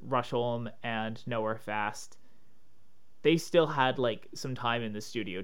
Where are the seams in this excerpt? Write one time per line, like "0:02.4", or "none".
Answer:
none